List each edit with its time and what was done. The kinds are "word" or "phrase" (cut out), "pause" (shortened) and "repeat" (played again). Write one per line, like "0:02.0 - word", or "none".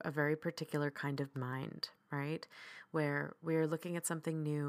0:01.3 - word